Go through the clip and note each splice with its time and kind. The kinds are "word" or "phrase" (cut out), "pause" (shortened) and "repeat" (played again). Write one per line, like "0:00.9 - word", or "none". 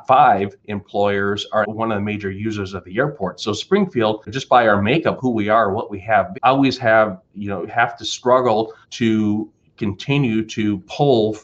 0:01.6 - word
0:04.3 - word
0:05.2 - word
0:06.3 - word
0:08.8 - pause

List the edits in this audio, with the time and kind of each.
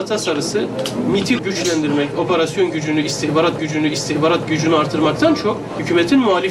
0:01.4 - word
0:03.6 - repeat

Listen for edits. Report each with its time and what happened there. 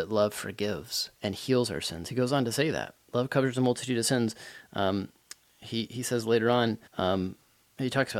0:01.2 - pause
0:06.9 - pause

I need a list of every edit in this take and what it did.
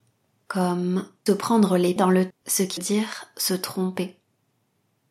0:01.3 - word
0:02.0 - word
0:02.3 - word
0:02.8 - word

